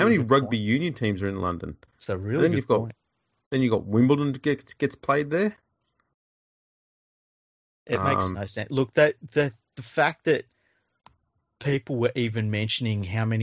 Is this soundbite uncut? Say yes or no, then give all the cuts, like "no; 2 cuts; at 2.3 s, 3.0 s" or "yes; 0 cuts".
yes; 0 cuts